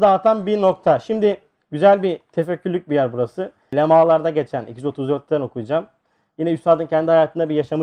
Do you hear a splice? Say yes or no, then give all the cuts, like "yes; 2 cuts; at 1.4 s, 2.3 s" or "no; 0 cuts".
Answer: no; 0 cuts